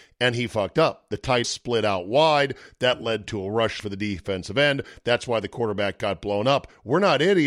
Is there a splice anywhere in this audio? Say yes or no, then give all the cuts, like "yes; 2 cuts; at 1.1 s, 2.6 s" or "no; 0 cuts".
yes; 2 cuts; at 1.4 s, 3.8 s